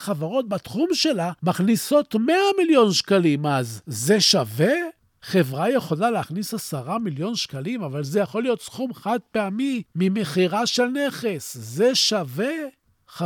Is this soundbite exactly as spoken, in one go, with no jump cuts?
no; 2 cuts; at 1.4 s, 9.9 s

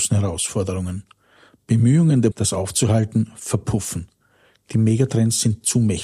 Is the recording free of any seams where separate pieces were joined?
no; 1 cut; at 2.3 s

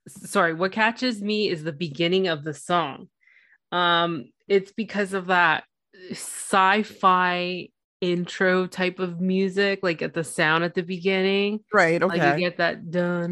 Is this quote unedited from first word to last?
yes; 0 cuts

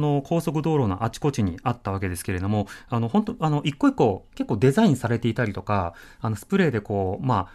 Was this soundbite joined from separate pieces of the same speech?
no; 0 cuts

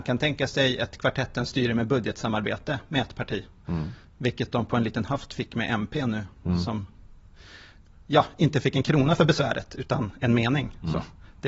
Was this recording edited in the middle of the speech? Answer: no; 0 cuts

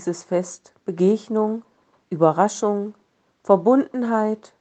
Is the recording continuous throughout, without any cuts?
yes; 0 cuts

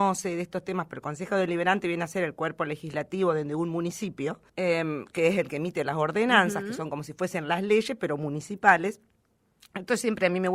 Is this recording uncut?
no; 1 cut; at 4.5 s

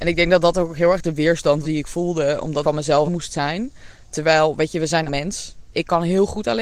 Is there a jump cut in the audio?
yes; 4 cuts; at 1.6 s, 2.6 s, 3.0 s, 5.1 s

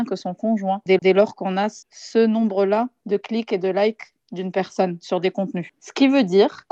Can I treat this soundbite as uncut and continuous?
no; 2 cuts; at 1.0 s, 1.8 s

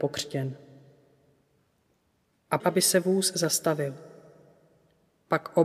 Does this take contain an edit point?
yes; 1 cut; at 2.6 s

